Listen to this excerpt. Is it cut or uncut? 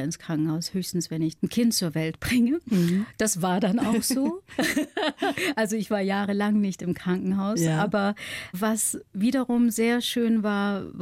cut